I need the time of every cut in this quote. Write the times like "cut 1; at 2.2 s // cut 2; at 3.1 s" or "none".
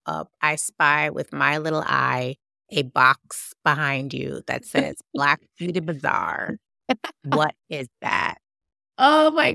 none